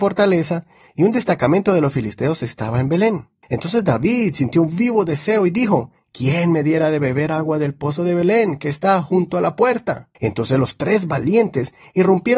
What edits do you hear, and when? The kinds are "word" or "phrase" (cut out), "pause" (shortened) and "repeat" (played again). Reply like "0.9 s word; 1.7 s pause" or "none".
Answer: 3.4 s pause; 10.1 s pause